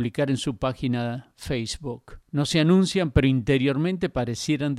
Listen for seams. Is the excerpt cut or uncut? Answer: cut